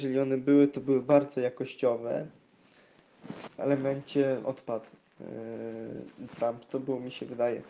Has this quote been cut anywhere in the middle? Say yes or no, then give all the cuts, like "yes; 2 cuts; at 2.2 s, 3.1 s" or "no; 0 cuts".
yes; 3 cuts; at 3.6 s, 4.4 s, 6.3 s